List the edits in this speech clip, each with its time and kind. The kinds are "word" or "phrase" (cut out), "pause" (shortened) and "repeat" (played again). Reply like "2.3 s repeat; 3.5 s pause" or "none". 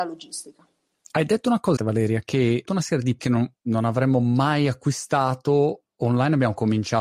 1.8 s word; 2.6 s word; 3.2 s word; 3.6 s pause